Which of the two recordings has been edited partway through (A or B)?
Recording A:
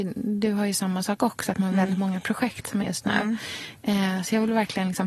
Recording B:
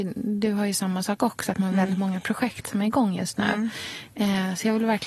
A